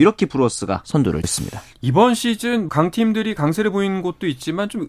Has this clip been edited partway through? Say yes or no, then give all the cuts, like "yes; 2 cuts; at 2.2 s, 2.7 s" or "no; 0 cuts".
yes; 2 cuts; at 1.2 s, 2.7 s